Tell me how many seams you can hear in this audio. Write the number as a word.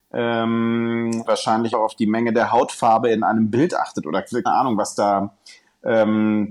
three